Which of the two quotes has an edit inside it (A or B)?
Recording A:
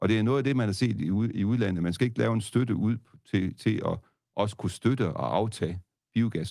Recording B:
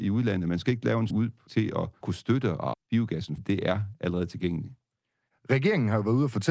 B